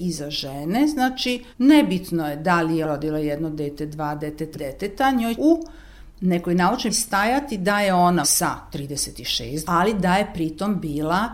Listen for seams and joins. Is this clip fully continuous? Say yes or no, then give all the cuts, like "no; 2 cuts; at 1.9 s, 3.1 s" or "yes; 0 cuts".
no; 7 cuts; at 1.5 s, 2.8 s, 4.5 s, 5.4 s, 6.9 s, 8.2 s, 9.6 s